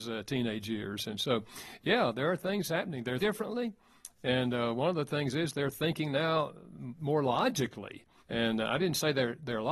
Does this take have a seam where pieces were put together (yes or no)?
yes